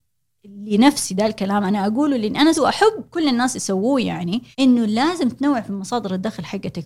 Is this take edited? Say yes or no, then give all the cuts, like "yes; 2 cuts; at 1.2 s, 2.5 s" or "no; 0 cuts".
yes; 2 cuts; at 2.5 s, 4.5 s